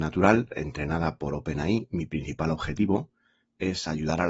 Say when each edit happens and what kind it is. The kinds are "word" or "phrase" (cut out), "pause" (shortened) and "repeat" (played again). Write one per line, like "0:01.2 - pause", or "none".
none